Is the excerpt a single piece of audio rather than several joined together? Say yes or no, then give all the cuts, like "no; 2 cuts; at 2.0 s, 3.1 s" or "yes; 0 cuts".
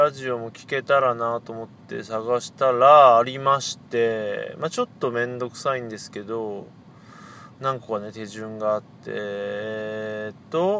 yes; 0 cuts